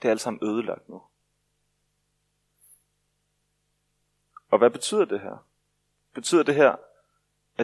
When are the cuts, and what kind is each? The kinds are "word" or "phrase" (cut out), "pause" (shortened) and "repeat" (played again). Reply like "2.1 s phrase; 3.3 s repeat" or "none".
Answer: none